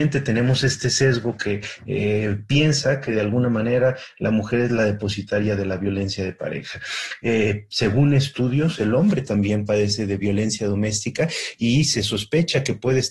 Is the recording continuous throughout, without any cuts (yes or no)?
yes